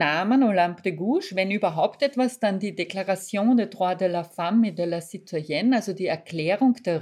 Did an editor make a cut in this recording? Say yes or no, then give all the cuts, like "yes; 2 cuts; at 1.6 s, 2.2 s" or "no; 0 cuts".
no; 0 cuts